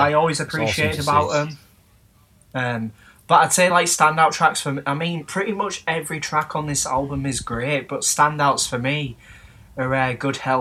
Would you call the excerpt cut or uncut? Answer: uncut